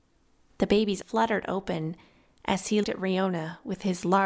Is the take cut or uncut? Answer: cut